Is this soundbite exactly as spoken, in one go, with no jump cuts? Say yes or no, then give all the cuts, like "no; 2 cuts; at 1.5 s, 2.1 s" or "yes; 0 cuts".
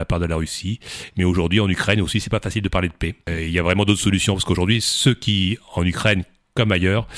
yes; 0 cuts